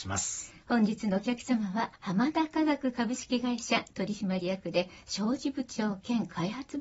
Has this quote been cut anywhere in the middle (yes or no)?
yes